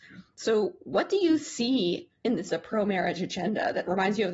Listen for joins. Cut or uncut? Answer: cut